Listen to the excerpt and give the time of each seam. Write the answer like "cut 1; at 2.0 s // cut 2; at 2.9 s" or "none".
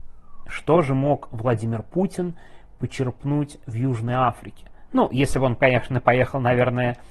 none